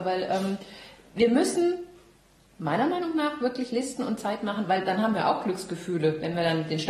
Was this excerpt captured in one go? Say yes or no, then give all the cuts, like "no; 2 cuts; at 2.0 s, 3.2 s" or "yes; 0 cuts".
yes; 0 cuts